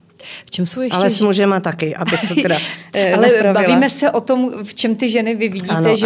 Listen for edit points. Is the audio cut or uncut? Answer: uncut